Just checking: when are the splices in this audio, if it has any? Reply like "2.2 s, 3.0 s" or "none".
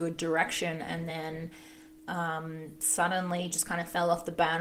none